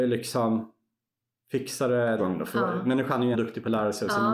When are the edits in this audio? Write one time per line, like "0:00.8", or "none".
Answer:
0:02.2
0:03.3

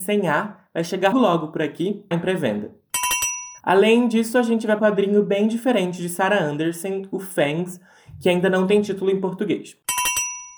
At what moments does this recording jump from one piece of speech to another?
0:01.1
0:02.1
0:03.6
0:04.8

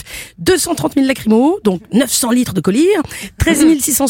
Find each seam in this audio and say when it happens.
none

